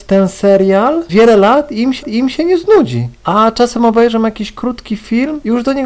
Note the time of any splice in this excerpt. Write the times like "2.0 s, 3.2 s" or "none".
1.1 s, 2.0 s